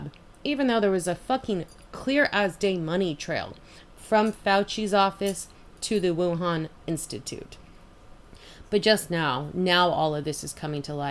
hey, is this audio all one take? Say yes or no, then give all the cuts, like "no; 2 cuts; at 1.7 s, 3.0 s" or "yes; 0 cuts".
yes; 0 cuts